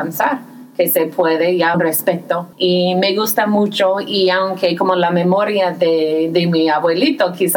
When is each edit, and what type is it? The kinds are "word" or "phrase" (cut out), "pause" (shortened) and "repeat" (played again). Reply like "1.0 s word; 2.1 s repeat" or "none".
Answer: 1.7 s phrase; 2.5 s pause